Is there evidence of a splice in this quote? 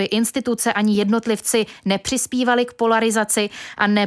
no; 0 cuts

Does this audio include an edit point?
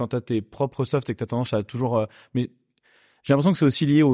no; 0 cuts

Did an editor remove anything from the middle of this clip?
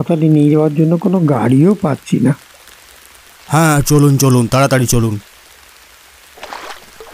no; 0 cuts

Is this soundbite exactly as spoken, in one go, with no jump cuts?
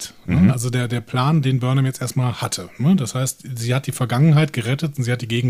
yes; 0 cuts

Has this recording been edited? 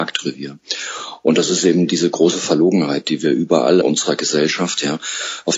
yes; 1 cut; at 3.8 s

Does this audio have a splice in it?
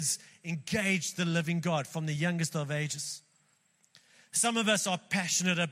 no; 0 cuts

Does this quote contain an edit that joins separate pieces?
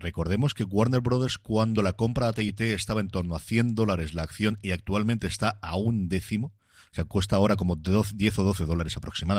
no; 0 cuts

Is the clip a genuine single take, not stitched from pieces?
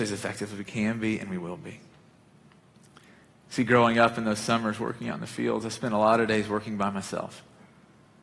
yes; 0 cuts

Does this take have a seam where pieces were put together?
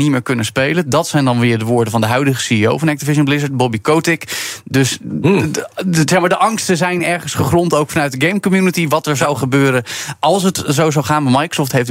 no; 0 cuts

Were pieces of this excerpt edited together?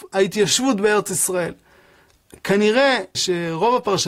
yes; 1 cut; at 3.1 s

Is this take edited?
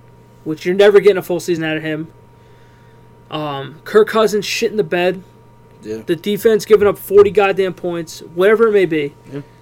no; 0 cuts

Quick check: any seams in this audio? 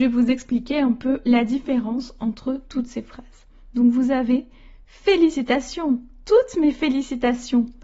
no; 0 cuts

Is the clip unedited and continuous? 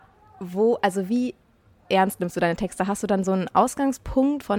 yes; 0 cuts

